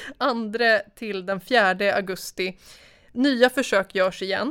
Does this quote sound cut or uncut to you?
uncut